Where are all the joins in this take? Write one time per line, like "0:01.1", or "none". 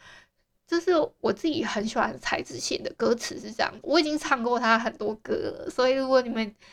0:03.8